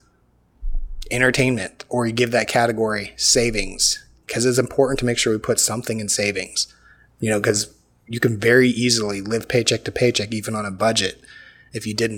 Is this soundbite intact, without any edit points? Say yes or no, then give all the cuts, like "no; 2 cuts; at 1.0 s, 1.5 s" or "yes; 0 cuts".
yes; 0 cuts